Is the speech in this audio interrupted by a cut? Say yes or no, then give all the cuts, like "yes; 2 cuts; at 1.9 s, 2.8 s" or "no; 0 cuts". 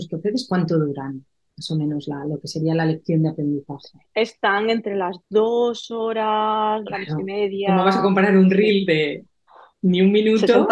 yes; 1 cut; at 6.8 s